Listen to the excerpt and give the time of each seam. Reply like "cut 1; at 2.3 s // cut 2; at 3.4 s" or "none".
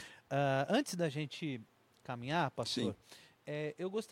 none